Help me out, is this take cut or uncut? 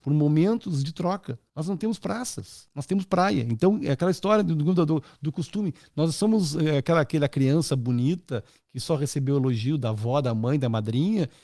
uncut